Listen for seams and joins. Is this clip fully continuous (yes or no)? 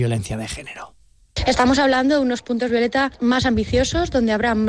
yes